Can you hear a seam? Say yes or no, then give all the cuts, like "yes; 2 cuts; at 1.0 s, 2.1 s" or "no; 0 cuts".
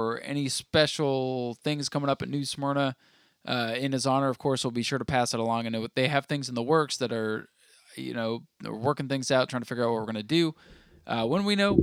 no; 0 cuts